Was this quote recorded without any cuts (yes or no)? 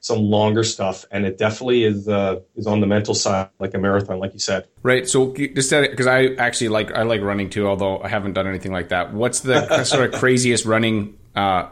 no